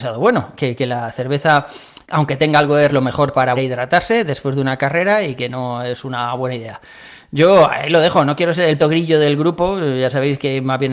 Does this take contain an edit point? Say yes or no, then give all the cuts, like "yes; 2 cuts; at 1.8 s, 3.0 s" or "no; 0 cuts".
yes; 4 cuts; at 2.0 s, 2.9 s, 3.6 s, 8.8 s